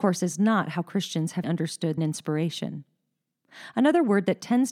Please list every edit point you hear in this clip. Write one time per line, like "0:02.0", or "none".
0:01.4
0:02.0

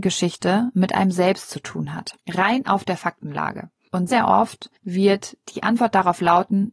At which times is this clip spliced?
0:02.2
0:04.1
0:04.8

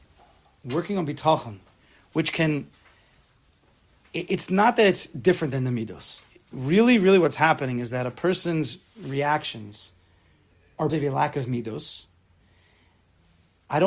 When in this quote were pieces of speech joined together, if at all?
0:10.9

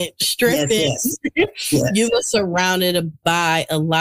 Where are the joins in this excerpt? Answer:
none

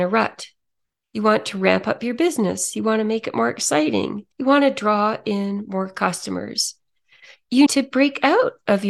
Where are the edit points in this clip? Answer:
0:04.3
0:07.7

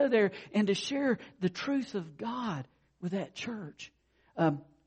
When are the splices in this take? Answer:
none

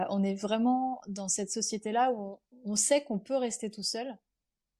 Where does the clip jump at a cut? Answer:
0:02.4

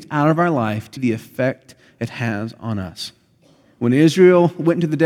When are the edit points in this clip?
0:01.0

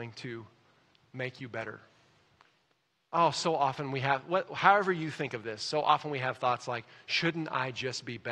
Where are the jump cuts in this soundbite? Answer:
none

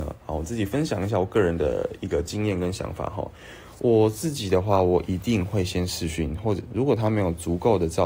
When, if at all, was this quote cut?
none

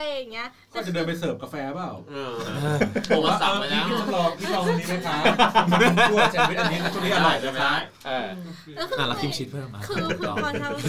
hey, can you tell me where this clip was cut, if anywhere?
none

